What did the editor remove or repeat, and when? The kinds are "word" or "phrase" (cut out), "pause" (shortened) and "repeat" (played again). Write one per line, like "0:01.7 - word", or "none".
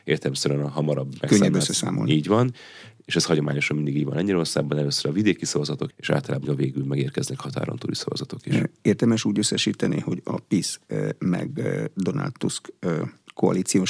0:05.9 - phrase
0:06.4 - word